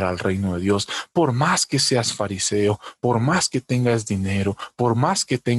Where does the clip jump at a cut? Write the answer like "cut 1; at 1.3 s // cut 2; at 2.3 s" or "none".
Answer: none